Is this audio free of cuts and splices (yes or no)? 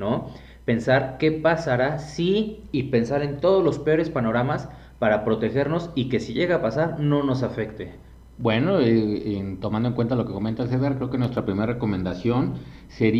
yes